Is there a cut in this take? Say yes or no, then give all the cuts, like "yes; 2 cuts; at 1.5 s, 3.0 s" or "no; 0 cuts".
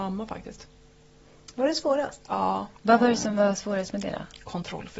yes; 1 cut; at 2.8 s